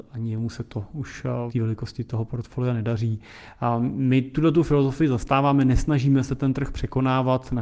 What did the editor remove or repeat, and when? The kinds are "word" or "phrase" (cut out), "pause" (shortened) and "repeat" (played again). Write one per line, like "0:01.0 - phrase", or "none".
0:01.5 - word

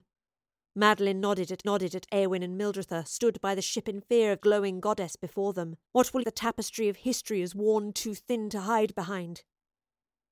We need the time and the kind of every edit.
0:01.6 - repeat
0:04.4 - phrase
0:05.8 - pause
0:06.2 - phrase

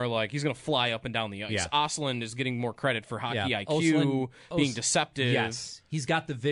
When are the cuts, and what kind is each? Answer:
none

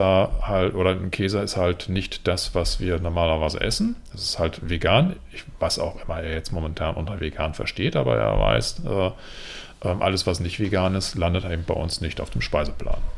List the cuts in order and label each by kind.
none

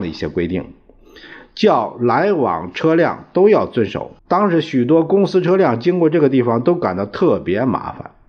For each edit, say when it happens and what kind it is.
0:04.2 - pause

